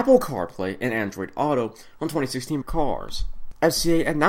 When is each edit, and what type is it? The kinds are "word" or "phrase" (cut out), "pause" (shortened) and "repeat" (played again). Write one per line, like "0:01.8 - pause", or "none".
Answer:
0:02.6 - phrase